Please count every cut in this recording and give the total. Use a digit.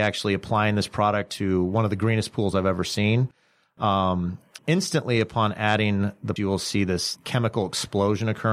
3